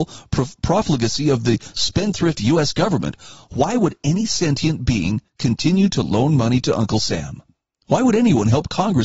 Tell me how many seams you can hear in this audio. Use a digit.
2